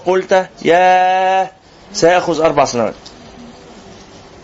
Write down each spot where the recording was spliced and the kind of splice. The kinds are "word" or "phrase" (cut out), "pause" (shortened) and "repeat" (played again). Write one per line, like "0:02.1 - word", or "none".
none